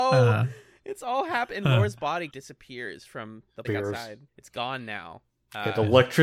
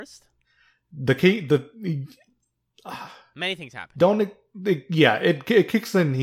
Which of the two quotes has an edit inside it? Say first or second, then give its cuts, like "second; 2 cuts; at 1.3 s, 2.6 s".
first; 3 cuts; at 2.3 s, 3.6 s, 4.3 s